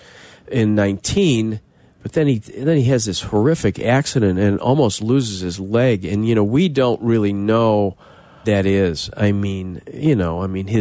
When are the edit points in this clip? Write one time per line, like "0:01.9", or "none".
0:08.4